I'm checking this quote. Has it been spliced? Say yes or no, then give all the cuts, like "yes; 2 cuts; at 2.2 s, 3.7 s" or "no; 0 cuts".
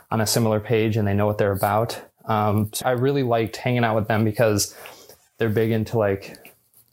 yes; 1 cut; at 2.8 s